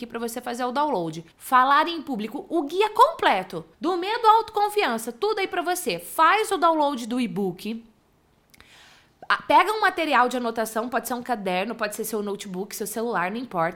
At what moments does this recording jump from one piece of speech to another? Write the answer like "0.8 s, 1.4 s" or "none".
1.3 s, 3.7 s